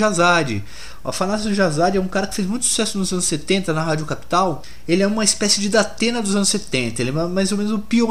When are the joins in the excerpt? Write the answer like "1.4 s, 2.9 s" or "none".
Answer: none